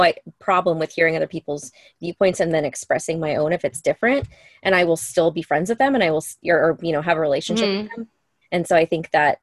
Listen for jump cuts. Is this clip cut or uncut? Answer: uncut